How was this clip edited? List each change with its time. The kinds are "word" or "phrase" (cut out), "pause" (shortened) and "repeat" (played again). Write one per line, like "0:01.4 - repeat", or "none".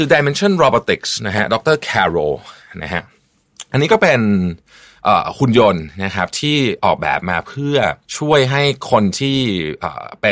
0:08.0 - pause